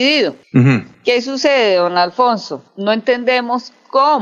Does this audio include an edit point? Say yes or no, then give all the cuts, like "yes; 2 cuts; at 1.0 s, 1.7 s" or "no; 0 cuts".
no; 0 cuts